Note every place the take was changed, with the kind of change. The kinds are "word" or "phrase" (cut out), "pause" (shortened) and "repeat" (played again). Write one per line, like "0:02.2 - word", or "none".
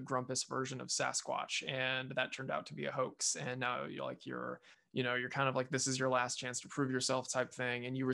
0:04.7 - pause